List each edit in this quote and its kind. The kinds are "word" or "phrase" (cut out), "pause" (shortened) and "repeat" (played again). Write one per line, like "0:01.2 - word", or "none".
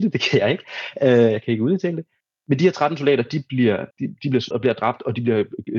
0:02.2 - pause
0:03.9 - pause
0:04.5 - word